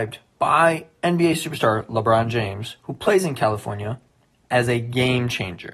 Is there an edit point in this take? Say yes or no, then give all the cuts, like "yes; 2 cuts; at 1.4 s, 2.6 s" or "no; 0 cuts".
no; 0 cuts